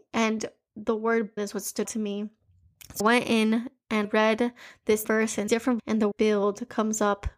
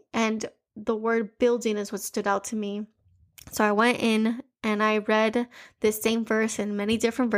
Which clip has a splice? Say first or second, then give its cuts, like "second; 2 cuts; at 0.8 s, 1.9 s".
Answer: first; 8 cuts; at 1.4 s, 1.9 s, 3.0 s, 4.0 s, 5.0 s, 5.5 s, 5.8 s, 6.1 s